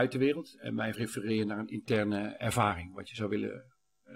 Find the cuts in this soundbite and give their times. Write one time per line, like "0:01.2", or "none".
0:00.9